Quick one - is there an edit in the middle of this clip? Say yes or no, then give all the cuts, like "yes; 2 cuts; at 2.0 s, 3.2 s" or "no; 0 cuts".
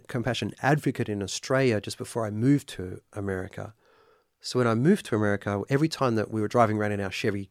no; 0 cuts